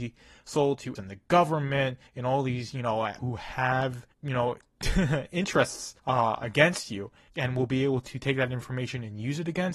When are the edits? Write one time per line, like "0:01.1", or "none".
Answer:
0:01.0
0:02.1
0:03.2
0:04.1
0:06.0
0:07.3